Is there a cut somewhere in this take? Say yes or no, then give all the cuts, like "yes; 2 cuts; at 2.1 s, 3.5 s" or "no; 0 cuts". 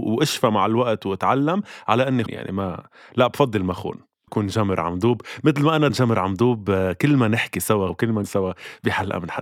yes; 5 cuts; at 2.3 s, 4.3 s, 5.9 s, 7.9 s, 8.2 s